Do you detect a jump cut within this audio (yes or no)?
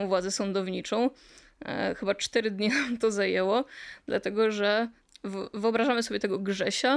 no